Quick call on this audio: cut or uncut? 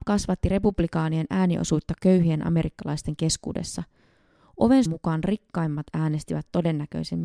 cut